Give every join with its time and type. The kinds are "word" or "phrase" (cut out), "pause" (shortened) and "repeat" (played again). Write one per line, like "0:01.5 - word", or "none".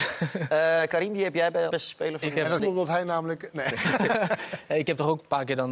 0:01.7 - word
0:02.6 - word